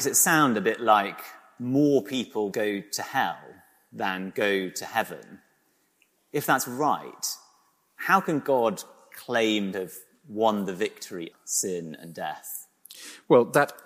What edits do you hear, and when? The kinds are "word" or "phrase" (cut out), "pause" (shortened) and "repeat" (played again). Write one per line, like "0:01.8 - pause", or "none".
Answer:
0:02.5 - word
0:09.7 - word
0:11.3 - word

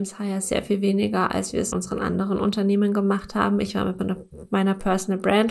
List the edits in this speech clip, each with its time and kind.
0:01.7 - word

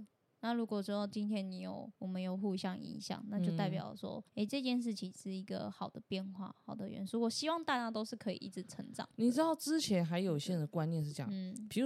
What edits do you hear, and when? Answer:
0:01.9 - pause
0:04.3 - pause

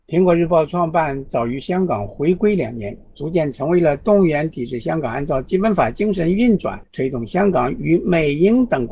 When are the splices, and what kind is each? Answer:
0:06.8 - pause

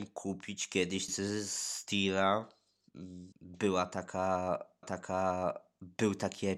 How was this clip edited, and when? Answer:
0:01.1 - word
0:03.3 - pause
0:04.8 - repeat

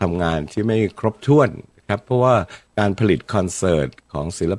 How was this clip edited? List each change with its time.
0:02.7 - pause

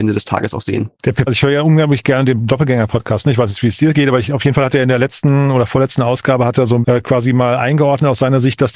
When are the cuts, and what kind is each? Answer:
0:01.3 - word
0:06.8 - word

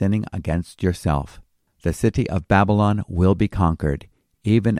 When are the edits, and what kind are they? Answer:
none

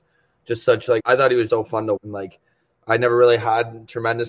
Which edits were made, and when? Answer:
0:01.0 - word
0:01.5 - word
0:02.0 - word

